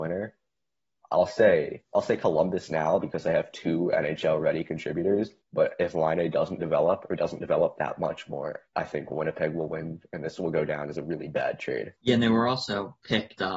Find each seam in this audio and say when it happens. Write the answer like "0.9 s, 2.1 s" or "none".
1.9 s, 5.4 s, 8.7 s, 12.0 s